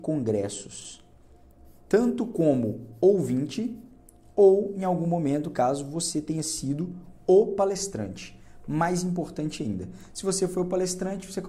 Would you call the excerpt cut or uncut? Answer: uncut